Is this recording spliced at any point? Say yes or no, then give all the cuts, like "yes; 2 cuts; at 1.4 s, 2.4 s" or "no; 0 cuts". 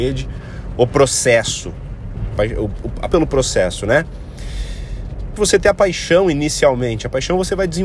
yes; 3 cuts; at 2.4 s, 3.1 s, 5.4 s